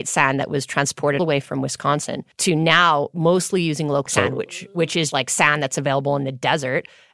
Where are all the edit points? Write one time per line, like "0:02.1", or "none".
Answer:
0:01.2
0:02.3
0:04.1
0:05.1

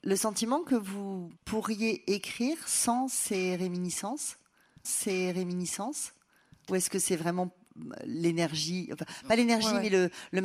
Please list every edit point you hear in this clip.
0:01.4
0:04.8

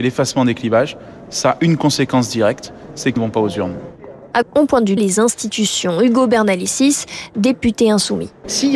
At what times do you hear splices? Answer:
0:03.2
0:04.4
0:05.0

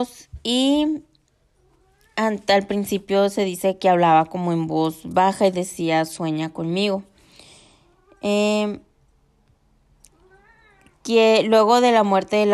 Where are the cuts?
none

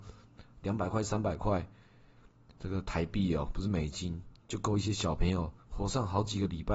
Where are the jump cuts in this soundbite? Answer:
0:04.4
0:05.6

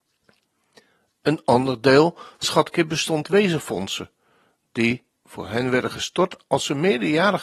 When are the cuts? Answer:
0:02.4
0:03.2

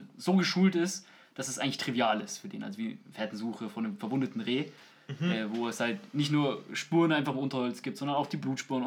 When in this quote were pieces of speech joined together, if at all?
none

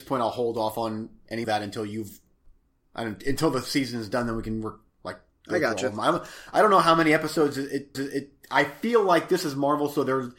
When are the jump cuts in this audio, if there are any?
0:01.4
0:07.9

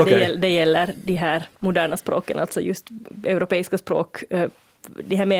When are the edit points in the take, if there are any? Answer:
0:01.6

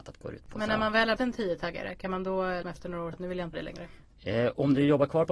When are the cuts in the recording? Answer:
0:01.2
0:02.6
0:03.1
0:03.5

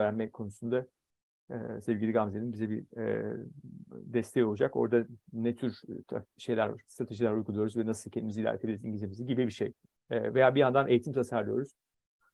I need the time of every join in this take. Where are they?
none

